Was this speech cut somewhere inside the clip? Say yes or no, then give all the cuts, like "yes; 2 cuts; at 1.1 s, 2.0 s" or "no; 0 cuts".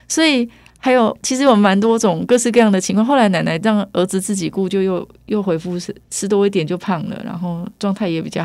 yes; 1 cut; at 6.0 s